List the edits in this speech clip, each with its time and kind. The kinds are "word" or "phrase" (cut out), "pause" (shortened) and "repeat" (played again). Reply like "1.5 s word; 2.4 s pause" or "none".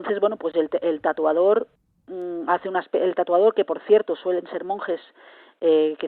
none